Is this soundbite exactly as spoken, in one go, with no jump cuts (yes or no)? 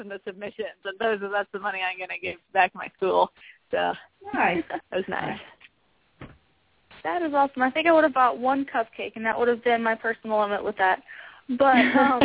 yes